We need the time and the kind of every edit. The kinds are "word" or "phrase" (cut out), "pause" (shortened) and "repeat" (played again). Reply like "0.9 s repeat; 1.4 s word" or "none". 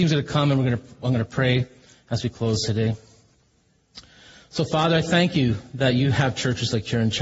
none